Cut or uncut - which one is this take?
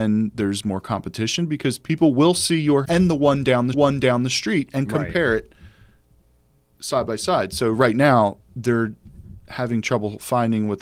cut